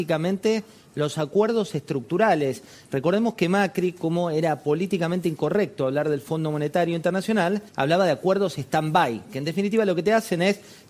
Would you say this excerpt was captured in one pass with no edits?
no; 1 cut; at 7.7 s

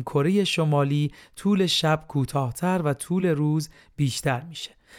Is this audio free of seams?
yes; 0 cuts

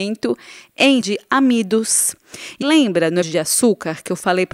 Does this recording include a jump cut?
yes; 3 cuts; at 1.0 s, 2.6 s, 3.2 s

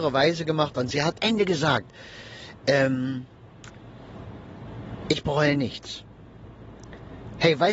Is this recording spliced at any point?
yes; 1 cut; at 1.2 s

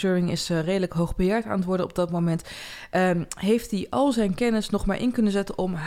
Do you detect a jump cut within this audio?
no; 0 cuts

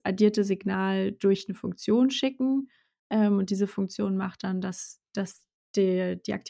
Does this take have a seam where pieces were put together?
no; 0 cuts

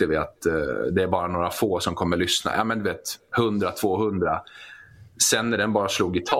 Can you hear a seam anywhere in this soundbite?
no; 0 cuts

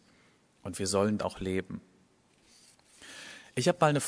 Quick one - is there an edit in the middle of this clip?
yes; 1 cut; at 1.2 s

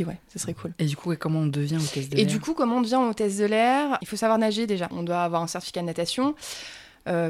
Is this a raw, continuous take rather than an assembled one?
yes; 0 cuts

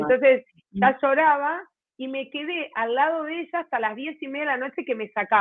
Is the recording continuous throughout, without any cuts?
yes; 0 cuts

